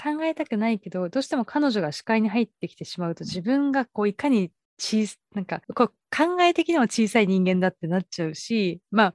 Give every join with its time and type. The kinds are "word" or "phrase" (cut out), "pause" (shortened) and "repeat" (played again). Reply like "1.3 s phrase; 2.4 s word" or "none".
5.6 s pause